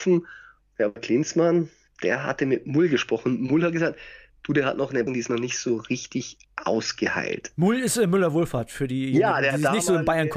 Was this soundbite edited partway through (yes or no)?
yes